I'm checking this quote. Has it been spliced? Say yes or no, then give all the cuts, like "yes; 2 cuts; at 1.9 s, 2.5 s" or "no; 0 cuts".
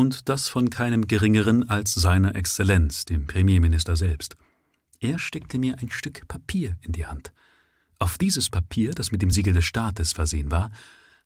no; 0 cuts